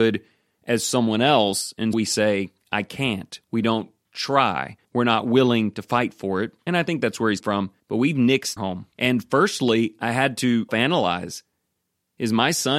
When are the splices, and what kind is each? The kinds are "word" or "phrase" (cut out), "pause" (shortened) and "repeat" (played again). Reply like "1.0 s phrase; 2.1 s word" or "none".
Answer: 1.9 s word; 4.8 s pause; 7.4 s word; 7.8 s pause; 8.6 s phrase; 8.9 s pause; 10.7 s word